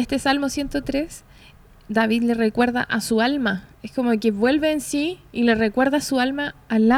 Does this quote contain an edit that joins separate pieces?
yes; 1 cut; at 3.7 s

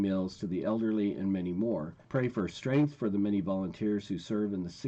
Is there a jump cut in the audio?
yes; 1 cut; at 2.0 s

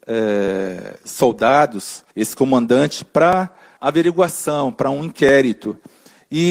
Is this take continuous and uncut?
no; 2 cuts; at 2.1 s, 3.8 s

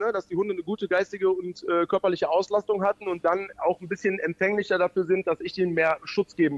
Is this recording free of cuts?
yes; 0 cuts

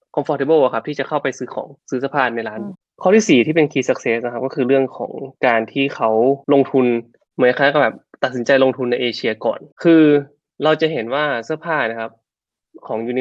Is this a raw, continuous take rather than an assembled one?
no; 3 cuts; at 1.8 s, 6.4 s, 9.7 s

